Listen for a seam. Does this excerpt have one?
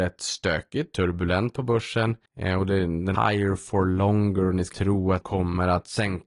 yes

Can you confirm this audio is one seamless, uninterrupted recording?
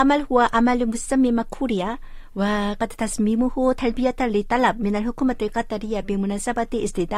yes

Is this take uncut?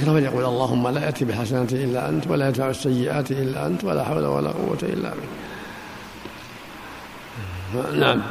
yes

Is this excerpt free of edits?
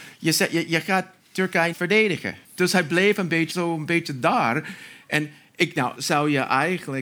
no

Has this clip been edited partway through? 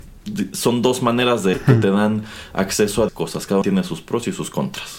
yes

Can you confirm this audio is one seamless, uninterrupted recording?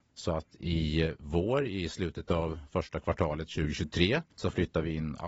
no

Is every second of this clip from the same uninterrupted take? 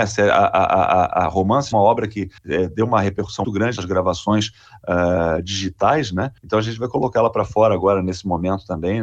no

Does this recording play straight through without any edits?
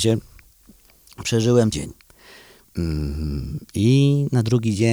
no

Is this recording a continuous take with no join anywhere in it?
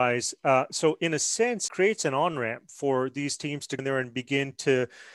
no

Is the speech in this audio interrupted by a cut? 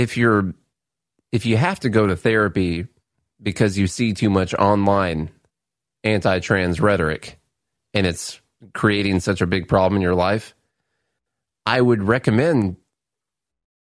no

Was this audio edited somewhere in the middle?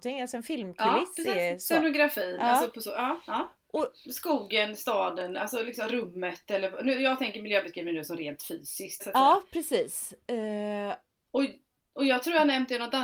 yes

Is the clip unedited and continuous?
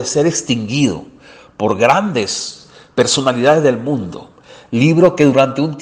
yes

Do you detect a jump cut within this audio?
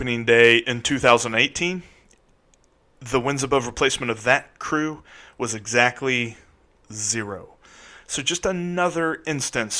no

